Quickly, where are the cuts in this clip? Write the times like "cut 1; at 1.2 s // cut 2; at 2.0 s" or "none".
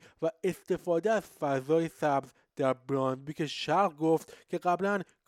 none